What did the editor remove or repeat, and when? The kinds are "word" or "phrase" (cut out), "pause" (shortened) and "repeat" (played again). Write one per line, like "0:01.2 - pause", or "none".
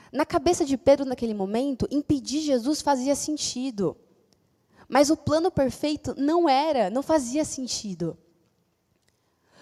none